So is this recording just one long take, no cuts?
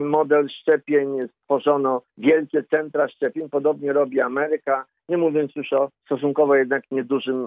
no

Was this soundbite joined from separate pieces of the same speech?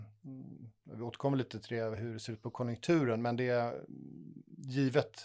no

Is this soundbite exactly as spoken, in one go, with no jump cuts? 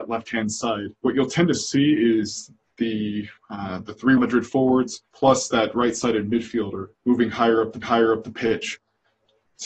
no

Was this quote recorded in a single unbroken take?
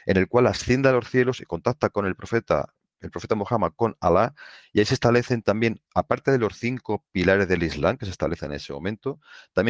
yes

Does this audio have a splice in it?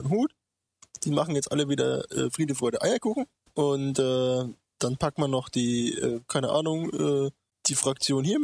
no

